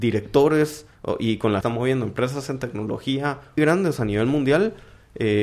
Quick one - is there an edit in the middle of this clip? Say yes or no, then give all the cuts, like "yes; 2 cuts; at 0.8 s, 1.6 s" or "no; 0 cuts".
yes; 3 cuts; at 0.9 s, 1.6 s, 3.6 s